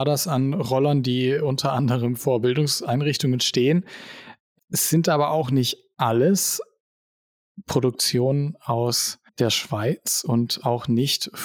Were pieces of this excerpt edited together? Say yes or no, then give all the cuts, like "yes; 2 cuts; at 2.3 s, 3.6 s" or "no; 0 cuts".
yes; 2 cuts; at 4.6 s, 9.3 s